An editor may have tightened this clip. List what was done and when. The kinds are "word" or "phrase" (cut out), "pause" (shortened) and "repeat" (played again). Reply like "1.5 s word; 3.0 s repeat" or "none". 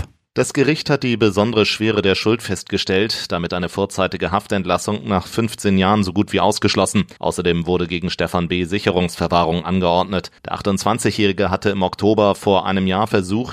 3.5 s word; 7.2 s pause; 10.4 s pause